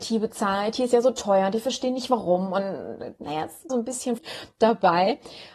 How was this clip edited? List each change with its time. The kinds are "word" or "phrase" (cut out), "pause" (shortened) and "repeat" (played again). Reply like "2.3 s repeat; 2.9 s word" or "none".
3.2 s word; 3.7 s word; 4.2 s word